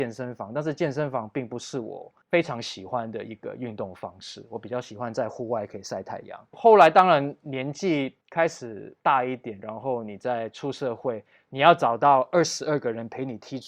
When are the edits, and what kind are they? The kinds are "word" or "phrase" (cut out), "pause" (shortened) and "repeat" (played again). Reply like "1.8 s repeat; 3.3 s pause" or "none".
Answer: 9.0 s pause